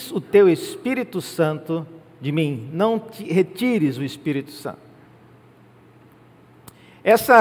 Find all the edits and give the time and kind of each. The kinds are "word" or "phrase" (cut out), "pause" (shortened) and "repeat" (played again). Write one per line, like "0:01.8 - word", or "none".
none